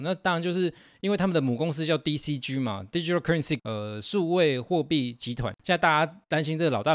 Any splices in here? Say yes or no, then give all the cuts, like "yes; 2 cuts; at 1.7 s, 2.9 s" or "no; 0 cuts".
yes; 1 cut; at 3.6 s